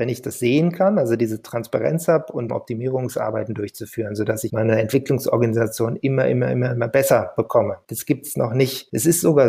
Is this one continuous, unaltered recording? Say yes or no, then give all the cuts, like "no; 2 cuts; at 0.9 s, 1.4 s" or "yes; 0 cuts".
no; 2 cuts; at 2.5 s, 4.5 s